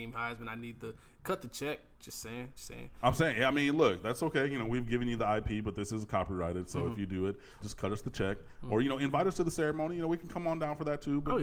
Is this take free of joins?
no; 2 cuts; at 2.6 s, 7.6 s

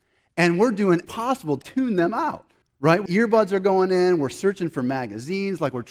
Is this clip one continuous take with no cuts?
no; 4 cuts; at 1.0 s, 1.6 s, 2.6 s, 3.1 s

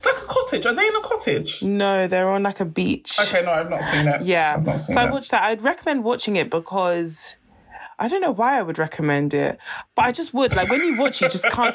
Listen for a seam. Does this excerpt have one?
no; 0 cuts

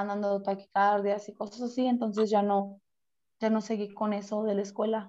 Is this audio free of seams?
yes; 0 cuts

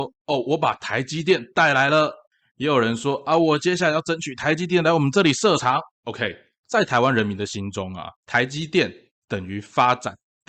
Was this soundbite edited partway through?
yes; 2 cuts; at 5.9 s, 8.1 s

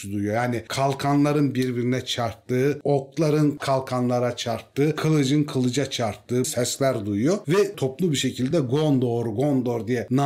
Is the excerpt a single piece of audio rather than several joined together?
yes; 0 cuts

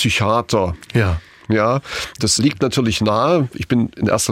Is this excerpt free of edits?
no; 1 cut; at 2.4 s

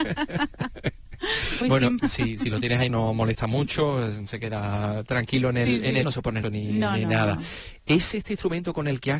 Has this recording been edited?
yes; 5 cuts; at 1.6 s, 2.0 s, 2.9 s, 6.0 s, 6.4 s

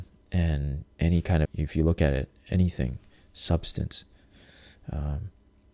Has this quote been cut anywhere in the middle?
yes; 2 cuts; at 0.9 s, 1.5 s

